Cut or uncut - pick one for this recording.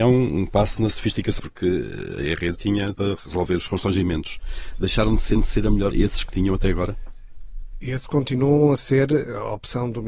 cut